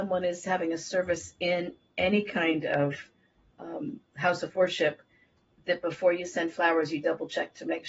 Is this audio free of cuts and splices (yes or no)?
yes